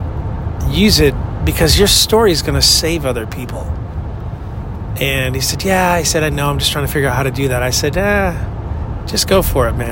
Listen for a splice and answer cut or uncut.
uncut